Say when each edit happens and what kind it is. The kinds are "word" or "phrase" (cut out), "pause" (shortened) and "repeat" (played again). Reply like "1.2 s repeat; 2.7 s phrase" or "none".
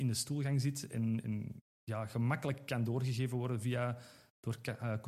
1.2 s word